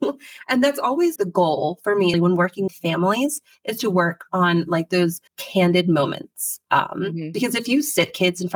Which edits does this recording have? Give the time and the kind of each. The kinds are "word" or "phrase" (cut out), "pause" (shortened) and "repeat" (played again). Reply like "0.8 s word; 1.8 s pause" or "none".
1.2 s word; 2.1 s word; 2.7 s word; 5.3 s pause